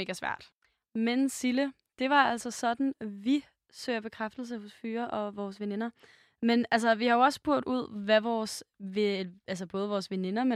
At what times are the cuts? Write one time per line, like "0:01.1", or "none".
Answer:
none